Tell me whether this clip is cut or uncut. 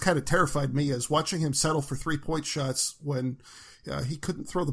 uncut